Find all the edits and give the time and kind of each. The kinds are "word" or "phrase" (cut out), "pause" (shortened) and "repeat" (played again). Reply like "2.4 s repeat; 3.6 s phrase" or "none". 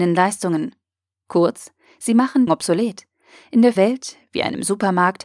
2.5 s phrase; 3.8 s word